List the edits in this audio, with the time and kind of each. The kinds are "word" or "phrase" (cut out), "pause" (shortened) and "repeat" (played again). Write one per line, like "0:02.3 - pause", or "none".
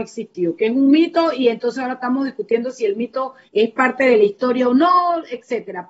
0:03.5 - pause